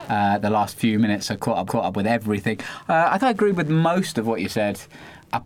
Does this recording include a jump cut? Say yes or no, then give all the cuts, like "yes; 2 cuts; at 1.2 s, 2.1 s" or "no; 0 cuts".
yes; 2 cuts; at 1.7 s, 3.2 s